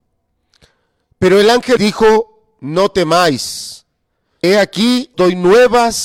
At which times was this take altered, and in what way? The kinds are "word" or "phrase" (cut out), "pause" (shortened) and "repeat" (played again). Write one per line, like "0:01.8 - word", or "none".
0:01.8 - word
0:04.4 - word
0:05.1 - word